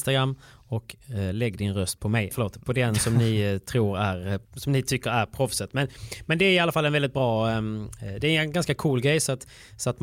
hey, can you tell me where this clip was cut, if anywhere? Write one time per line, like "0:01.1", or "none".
0:02.3
0:04.4